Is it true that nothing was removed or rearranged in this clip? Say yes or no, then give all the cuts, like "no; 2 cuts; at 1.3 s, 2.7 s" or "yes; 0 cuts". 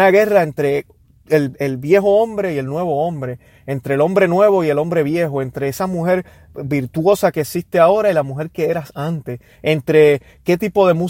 yes; 0 cuts